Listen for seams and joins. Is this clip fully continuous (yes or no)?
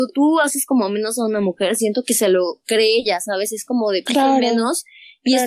no